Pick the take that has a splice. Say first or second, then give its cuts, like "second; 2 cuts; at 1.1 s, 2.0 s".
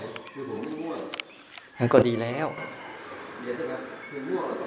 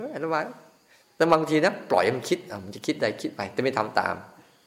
first; 1 cut; at 1.7 s